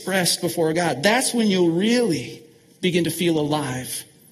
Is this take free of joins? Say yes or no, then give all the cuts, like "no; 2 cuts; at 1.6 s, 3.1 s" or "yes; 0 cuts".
yes; 0 cuts